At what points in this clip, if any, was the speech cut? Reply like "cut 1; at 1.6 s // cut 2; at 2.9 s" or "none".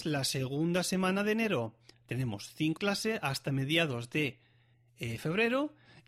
cut 1; at 2.8 s

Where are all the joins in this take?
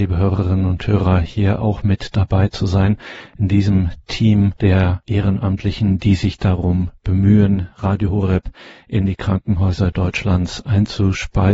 none

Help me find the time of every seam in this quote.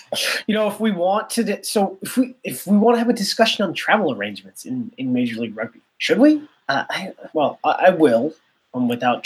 cut 1; at 5.9 s // cut 2; at 7.3 s

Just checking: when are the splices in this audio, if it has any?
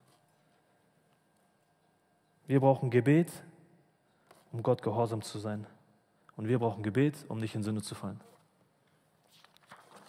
none

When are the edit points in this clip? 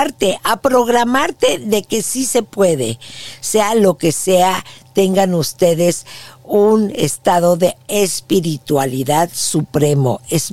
none

